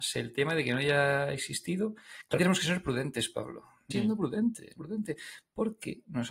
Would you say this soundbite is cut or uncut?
cut